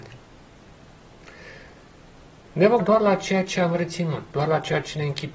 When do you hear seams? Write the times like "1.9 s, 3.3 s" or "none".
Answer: 2.8 s